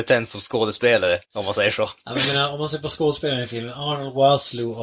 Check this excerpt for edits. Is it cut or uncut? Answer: cut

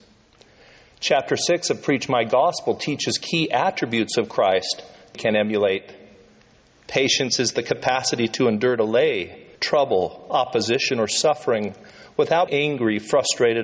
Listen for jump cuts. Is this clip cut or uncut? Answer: cut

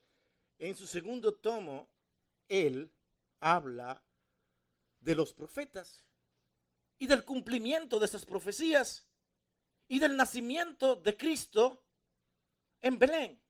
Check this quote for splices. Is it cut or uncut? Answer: uncut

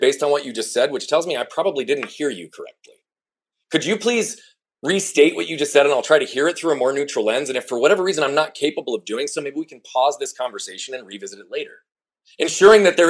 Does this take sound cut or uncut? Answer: uncut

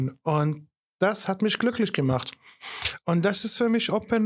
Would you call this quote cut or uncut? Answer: uncut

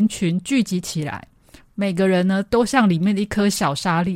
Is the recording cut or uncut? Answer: uncut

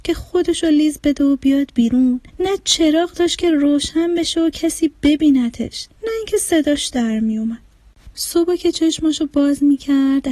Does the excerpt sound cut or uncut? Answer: cut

